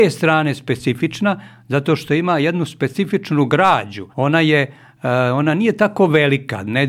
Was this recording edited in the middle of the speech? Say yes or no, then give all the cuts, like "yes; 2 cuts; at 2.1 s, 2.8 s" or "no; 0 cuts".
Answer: yes; 1 cut; at 4.1 s